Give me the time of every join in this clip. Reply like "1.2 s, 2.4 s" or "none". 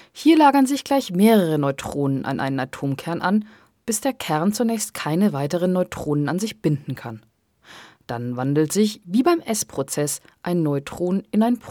none